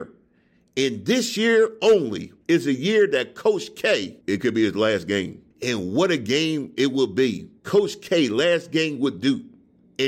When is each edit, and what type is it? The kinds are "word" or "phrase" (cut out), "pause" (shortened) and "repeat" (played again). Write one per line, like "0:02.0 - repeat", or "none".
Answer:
0:02.4 - pause
0:04.2 - pause
0:05.5 - pause
0:07.6 - pause